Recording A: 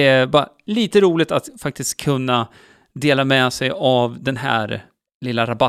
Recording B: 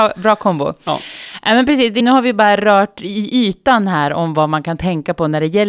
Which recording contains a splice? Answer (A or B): B